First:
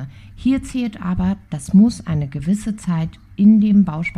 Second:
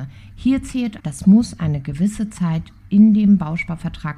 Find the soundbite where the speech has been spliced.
second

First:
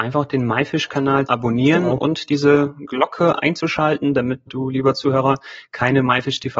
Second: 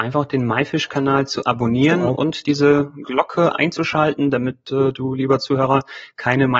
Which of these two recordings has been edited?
first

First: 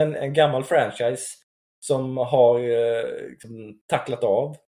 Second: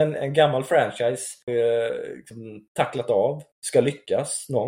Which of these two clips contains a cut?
second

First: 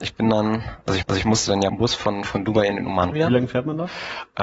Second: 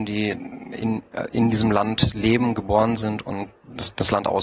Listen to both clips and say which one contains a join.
first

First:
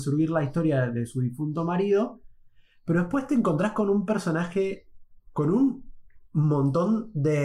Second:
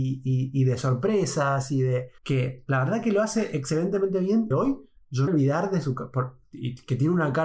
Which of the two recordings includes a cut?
second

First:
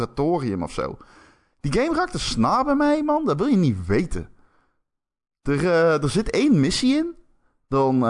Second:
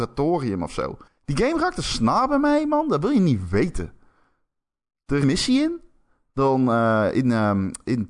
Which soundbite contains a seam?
second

